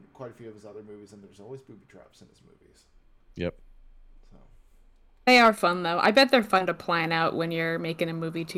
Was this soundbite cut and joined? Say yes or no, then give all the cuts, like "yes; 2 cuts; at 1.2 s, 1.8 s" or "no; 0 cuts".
no; 0 cuts